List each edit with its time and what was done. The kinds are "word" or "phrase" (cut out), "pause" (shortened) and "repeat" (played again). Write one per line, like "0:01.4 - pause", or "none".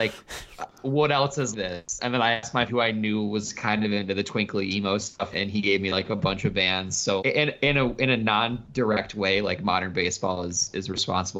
0:01.5 - word
0:02.7 - word
0:05.3 - word
0:07.2 - word

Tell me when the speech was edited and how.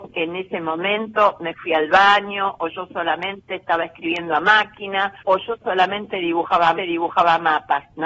0:05.2 - pause
0:06.8 - repeat

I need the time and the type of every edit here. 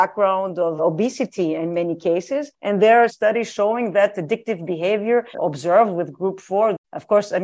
0:02.5 - pause
0:03.1 - word
0:05.3 - phrase

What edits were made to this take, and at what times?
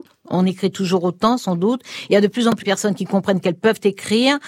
0:02.6 - word

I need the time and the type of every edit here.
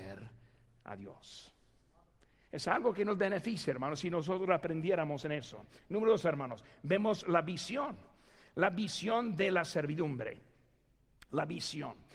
none

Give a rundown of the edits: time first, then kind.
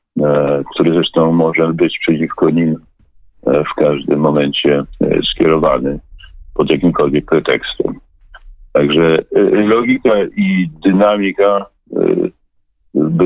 none

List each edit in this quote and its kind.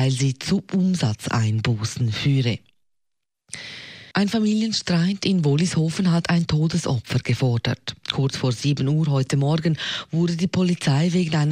0:04.1 - pause

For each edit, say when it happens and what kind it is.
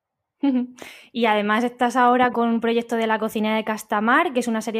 0:02.3 - word

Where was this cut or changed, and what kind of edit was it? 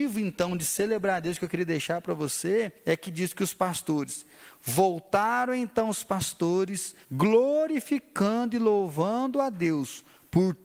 0:02.8 - pause
0:07.0 - pause

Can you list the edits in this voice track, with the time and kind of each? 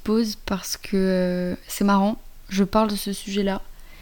none

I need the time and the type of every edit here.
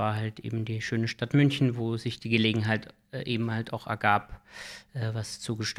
0:03.0 - pause

